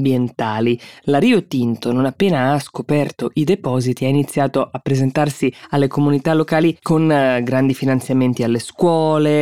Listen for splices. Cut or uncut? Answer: uncut